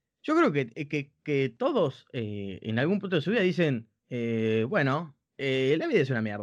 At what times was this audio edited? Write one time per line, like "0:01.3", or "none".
0:04.0
0:05.2

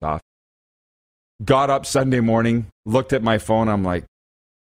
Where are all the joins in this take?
none

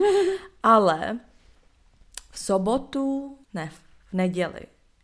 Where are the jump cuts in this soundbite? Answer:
0:03.4

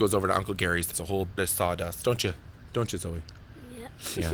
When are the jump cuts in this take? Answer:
0:00.9
0:01.4

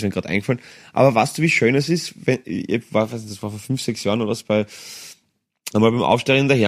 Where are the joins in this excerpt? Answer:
none

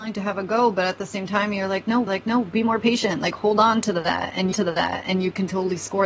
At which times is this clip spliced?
0:02.1
0:04.5

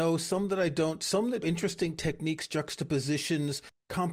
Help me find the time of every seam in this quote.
0:01.4

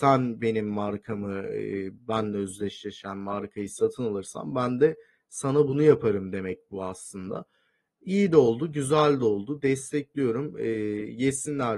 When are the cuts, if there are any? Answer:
none

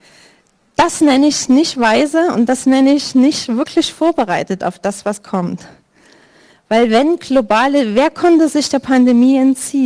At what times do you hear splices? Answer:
none

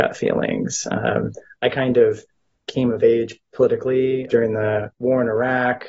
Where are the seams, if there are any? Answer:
0:04.3

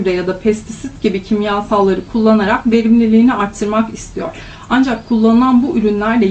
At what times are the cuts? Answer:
none

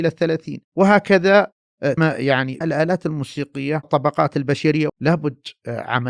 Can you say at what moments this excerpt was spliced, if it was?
0:02.0
0:02.6
0:03.8
0:04.9

